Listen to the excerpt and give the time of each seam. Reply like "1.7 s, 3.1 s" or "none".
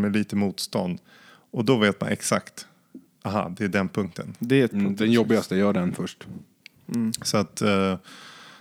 4.7 s